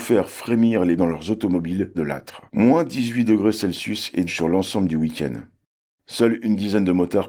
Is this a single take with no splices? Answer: no; 4 cuts; at 1.0 s, 1.9 s, 2.5 s, 4.3 s

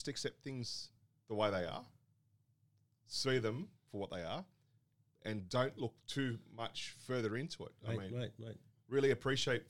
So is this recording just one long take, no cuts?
yes; 0 cuts

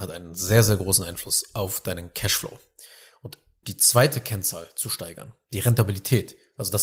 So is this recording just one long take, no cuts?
no; 1 cut; at 3.6 s

